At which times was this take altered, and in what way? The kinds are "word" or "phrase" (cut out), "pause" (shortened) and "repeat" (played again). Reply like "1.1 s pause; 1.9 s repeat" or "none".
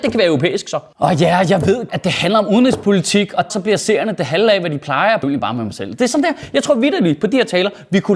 1.9 s word; 3.5 s word; 5.2 s phrase

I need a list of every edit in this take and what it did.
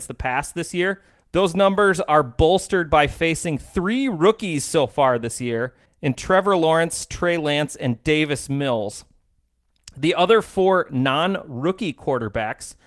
1.1 s pause; 5.9 s pause

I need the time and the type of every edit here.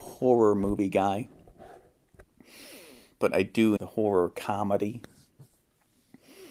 3.1 s word; 3.8 s word

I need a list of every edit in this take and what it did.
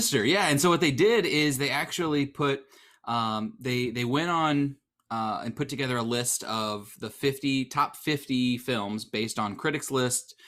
none

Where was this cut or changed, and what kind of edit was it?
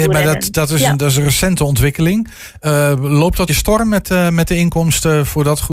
3.5 s phrase

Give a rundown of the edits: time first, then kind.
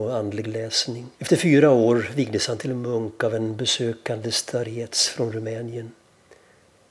1.1 s pause

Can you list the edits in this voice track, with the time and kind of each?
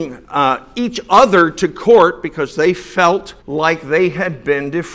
3.4 s pause

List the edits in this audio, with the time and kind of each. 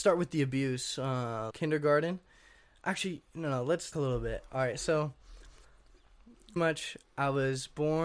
1.5 s phrase; 3.9 s phrase; 6.6 s word

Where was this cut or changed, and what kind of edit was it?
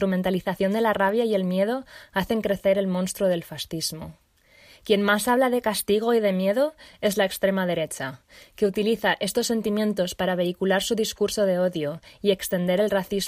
none

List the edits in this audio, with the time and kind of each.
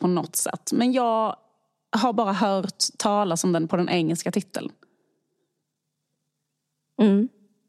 none

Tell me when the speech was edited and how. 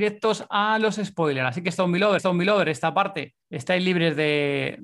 2.2 s repeat; 3.4 s pause

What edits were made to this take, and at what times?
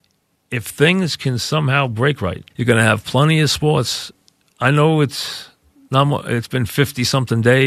2.5 s pause

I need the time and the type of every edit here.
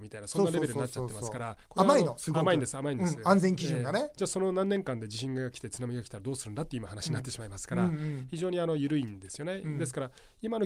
1.6 s pause

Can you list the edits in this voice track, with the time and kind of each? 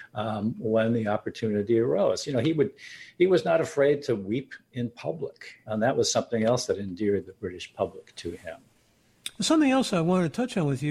5.7 s word

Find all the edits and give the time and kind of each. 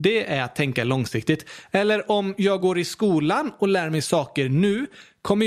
none

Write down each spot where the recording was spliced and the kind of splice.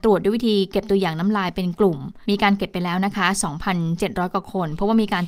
2.2 s pause

